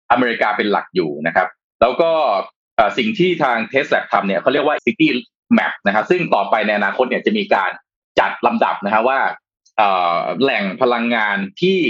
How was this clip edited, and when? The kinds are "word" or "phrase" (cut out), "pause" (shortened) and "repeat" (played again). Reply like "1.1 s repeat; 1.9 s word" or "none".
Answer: 4.8 s word